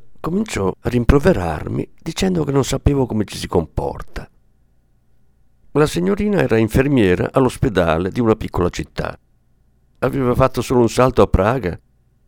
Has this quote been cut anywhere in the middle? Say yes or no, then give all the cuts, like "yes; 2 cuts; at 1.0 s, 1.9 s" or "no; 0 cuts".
no; 0 cuts